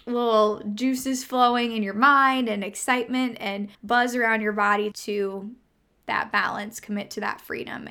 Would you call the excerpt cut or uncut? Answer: cut